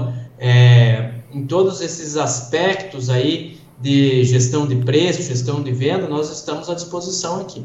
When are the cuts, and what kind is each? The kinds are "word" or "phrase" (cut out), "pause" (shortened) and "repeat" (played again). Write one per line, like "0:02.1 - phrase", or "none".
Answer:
none